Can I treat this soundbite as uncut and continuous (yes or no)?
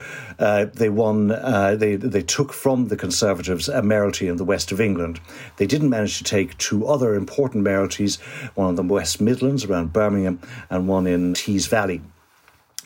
no